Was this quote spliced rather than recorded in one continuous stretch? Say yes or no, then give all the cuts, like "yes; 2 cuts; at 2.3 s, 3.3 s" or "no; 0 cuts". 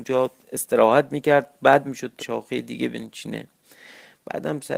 yes; 2 cuts; at 1.8 s, 2.2 s